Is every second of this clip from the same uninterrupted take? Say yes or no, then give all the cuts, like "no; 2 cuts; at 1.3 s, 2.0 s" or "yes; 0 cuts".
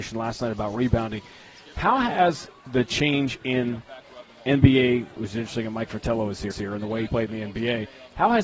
no; 3 cuts; at 5.2 s, 6.5 s, 7.1 s